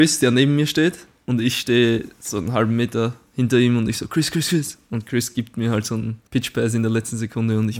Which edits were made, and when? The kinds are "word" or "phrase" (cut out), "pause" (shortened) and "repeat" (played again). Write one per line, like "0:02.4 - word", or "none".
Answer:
0:06.3 - pause